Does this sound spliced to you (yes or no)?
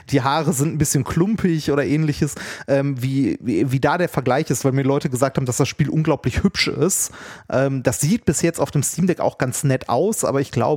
no